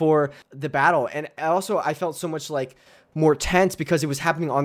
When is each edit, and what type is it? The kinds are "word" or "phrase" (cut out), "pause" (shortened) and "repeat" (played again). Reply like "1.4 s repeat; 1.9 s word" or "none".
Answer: none